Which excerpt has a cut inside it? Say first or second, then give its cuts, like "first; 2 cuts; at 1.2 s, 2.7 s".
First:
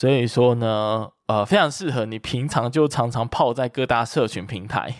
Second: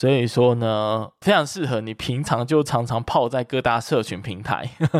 second; 1 cut; at 1.2 s